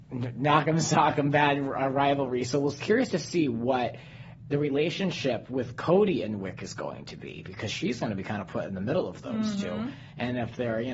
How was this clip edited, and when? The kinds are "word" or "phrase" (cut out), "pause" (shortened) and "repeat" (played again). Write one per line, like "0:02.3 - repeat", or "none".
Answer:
0:02.8 - word

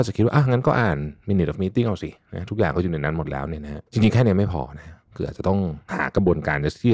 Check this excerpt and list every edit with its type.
0:03.9 - pause

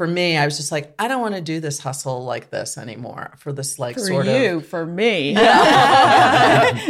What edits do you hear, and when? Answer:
none

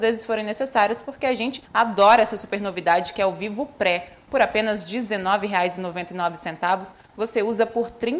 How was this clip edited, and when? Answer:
0:01.6 - pause

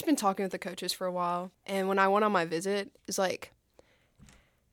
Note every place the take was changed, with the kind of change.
0:01.5 - pause
0:03.0 - pause

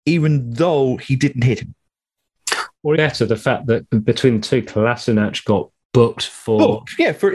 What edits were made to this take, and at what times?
0:03.0 - word
0:03.9 - word

